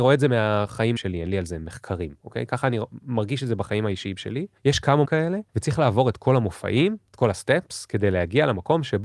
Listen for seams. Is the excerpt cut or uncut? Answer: cut